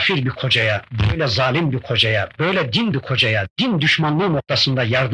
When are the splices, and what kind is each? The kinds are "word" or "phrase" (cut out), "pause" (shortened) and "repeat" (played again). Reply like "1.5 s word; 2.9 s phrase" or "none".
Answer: 2.9 s word